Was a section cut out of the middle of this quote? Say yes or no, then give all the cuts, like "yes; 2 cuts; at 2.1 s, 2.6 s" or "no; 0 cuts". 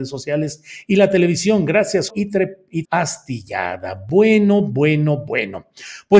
yes; 2 cuts; at 2.1 s, 2.8 s